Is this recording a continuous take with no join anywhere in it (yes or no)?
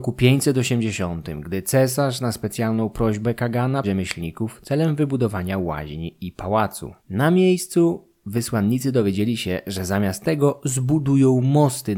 no